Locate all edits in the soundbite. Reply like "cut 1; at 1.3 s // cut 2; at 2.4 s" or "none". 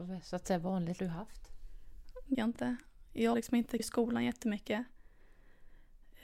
cut 1; at 1.0 s // cut 2; at 2.3 s // cut 3; at 3.3 s // cut 4; at 3.8 s

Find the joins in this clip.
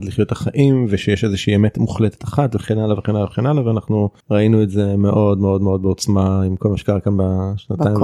cut 1; at 4.2 s

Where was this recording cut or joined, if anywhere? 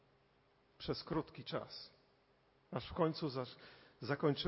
none

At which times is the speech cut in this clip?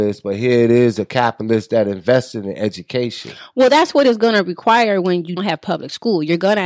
cut 1; at 5.4 s

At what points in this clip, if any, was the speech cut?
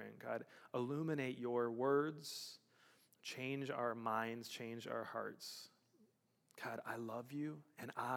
none

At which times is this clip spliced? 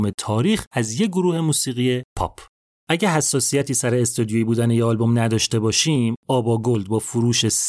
none

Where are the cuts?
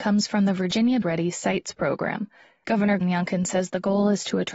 cut 1; at 1.0 s // cut 2; at 3.0 s

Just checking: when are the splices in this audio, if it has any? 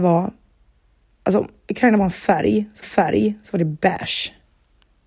cut 1; at 2.8 s

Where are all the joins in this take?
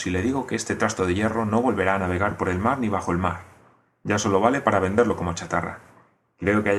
none

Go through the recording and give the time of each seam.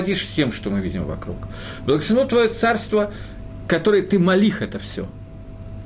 none

